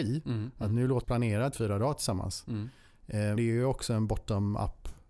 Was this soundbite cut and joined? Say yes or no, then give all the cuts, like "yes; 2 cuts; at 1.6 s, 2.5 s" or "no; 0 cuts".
yes; 3 cuts; at 1.0 s, 1.5 s, 3.4 s